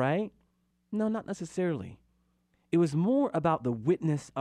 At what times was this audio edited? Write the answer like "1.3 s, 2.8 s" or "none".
none